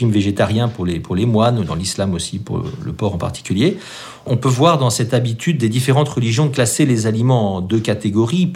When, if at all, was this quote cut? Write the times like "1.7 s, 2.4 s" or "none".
none

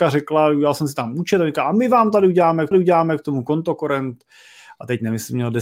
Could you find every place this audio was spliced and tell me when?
2.7 s

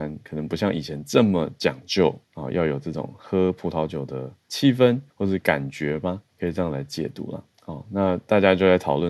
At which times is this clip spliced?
2.2 s, 5.1 s, 6.3 s, 7.5 s

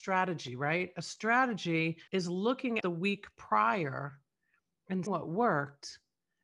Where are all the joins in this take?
2.1 s, 2.8 s, 5.1 s

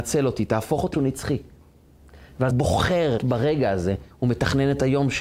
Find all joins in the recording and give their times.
0.9 s, 2.5 s, 3.2 s, 4.1 s

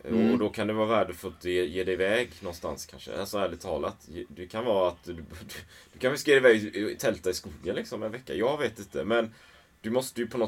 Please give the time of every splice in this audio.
none

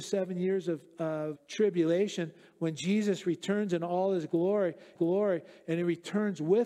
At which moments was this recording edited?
1.3 s, 4.9 s

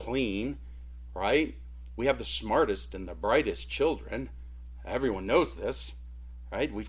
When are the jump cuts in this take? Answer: none

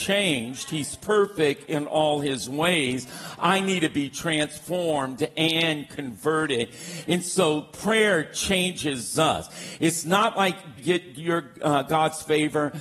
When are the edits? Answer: 10.8 s

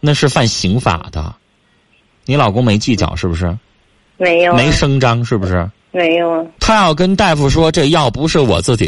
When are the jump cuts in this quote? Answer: 5.8 s, 6.6 s

